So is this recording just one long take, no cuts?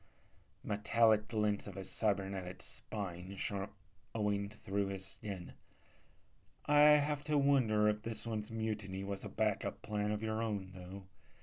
yes; 0 cuts

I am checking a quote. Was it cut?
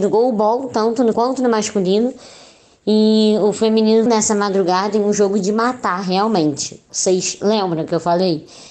yes; 2 cuts; at 1.1 s, 4.1 s

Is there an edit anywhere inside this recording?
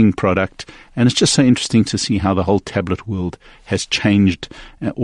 no; 0 cuts

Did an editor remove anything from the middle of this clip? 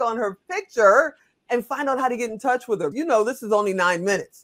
yes; 1 cut; at 2.9 s

